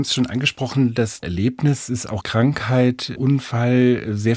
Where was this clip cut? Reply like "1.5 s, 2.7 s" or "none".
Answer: 1.2 s, 1.9 s, 2.2 s, 3.2 s